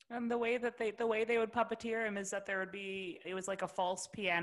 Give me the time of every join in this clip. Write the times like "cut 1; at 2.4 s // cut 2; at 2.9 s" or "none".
cut 1; at 3.2 s